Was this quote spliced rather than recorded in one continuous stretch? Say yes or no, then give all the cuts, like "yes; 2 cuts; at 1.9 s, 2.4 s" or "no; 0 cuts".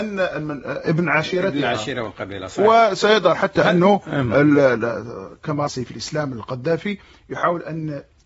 yes; 1 cut; at 5.7 s